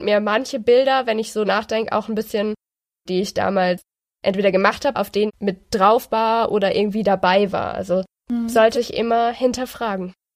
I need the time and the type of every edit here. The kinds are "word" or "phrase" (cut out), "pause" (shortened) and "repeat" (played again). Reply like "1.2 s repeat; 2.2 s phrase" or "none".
1.4 s word; 3.1 s word; 4.9 s word; 5.3 s word; 8.7 s word